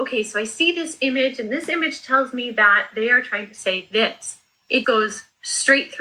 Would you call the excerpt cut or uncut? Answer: cut